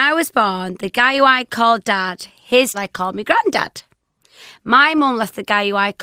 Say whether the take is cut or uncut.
cut